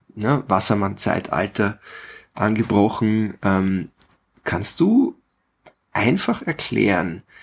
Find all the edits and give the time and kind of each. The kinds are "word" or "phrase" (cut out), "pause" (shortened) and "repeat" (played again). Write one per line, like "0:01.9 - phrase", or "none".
none